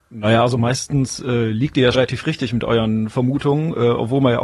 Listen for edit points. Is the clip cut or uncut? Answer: cut